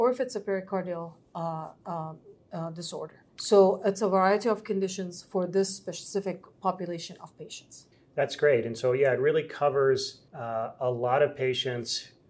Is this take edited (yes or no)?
yes